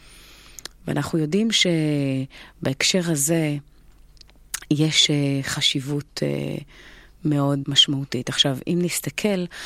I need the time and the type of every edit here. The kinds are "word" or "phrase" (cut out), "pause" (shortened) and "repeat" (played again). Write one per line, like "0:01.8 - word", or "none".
0:07.6 - word